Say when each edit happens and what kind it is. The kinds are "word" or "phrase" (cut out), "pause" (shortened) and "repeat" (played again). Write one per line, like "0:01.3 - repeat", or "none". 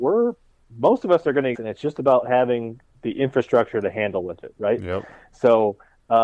0:01.5 - phrase
0:02.9 - pause